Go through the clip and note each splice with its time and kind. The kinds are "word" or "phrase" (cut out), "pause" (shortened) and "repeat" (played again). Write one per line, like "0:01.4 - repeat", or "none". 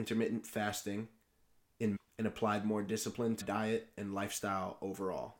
0:02.0 - word
0:03.4 - word

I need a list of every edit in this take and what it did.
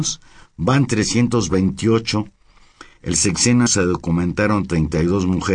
0:03.7 - word

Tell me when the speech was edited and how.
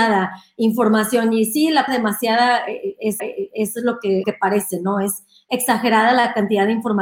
0:01.9 - word
0:03.2 - repeat
0:04.2 - word

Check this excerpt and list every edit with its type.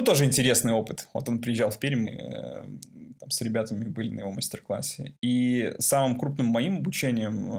0:02.1 - word

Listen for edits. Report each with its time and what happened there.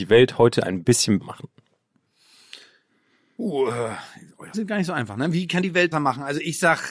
0:01.2 - word
0:04.5 - word
0:05.6 - word
0:05.9 - word

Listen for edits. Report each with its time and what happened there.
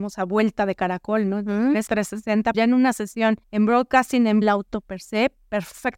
0:01.9 - word
0:02.5 - word
0:03.4 - pause
0:04.4 - phrase

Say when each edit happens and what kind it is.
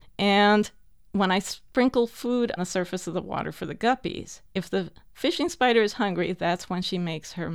0:02.6 - word
0:04.4 - pause

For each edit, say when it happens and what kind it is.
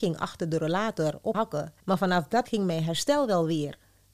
0:01.3 - word
0:01.8 - pause
0:02.5 - word

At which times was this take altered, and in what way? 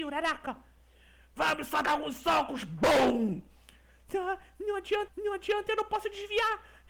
0:01.8 - word
0:05.1 - repeat

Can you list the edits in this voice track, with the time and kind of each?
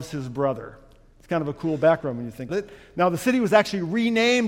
0:02.5 - word

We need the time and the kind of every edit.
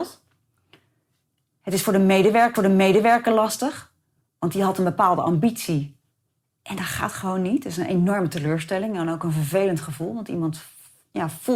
0:02.6 - repeat

